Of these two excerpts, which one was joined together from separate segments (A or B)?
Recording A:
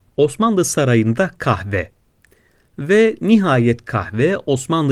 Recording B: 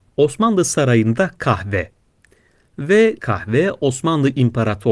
B